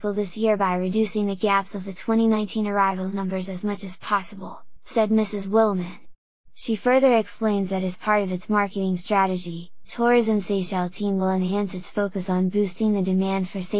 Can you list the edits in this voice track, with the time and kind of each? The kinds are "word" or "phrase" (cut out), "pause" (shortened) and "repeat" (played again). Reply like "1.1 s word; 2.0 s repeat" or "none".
9.9 s word